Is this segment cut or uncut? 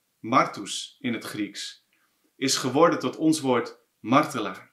uncut